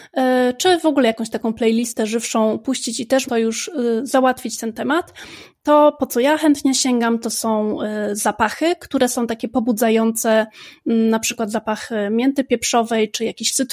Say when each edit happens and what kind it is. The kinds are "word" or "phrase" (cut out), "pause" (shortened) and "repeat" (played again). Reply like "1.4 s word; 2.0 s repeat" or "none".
3.2 s word

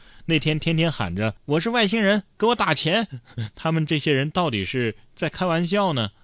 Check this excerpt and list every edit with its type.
1.4 s pause

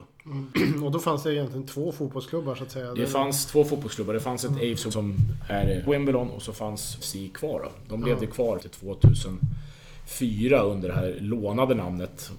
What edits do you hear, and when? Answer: 4.9 s word; 5.9 s word; 7.0 s word; 8.6 s word

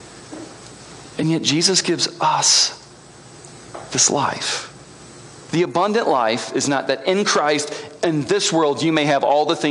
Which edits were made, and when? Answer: none

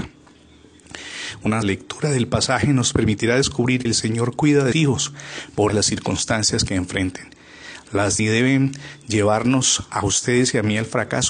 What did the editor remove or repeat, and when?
1.6 s word; 3.9 s word; 4.7 s word; 5.7 s word; 8.2 s phrase

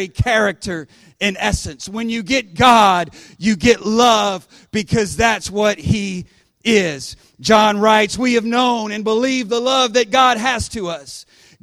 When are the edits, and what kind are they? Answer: none

